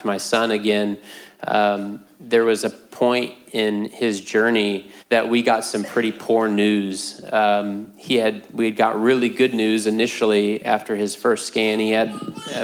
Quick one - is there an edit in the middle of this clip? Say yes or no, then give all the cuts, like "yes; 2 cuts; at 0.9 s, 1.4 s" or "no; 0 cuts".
yes; 1 cut; at 5.0 s